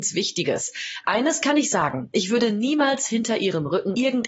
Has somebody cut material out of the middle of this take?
no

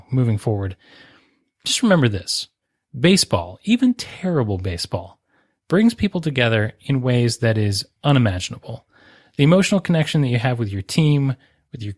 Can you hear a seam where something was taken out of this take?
no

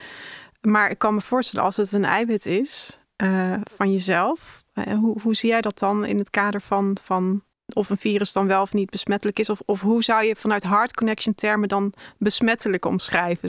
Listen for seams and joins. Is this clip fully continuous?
no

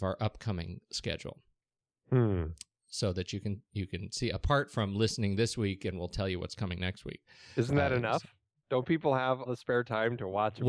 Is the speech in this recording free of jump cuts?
no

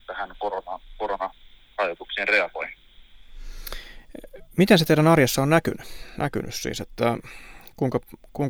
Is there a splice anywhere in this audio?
no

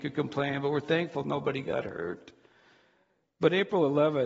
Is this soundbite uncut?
yes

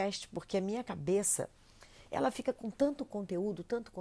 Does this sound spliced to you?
no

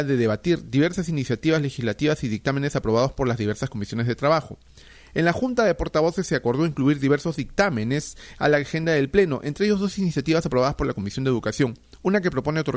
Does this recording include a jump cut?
no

